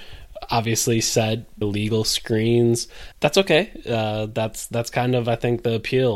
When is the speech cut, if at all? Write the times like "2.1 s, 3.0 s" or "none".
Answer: 1.6 s, 3.1 s